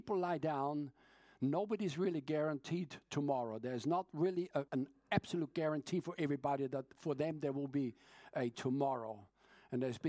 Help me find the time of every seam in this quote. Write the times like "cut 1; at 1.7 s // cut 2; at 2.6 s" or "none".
cut 1; at 4.7 s